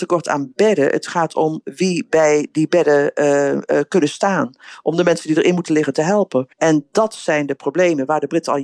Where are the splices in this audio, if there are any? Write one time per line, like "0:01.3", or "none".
0:06.5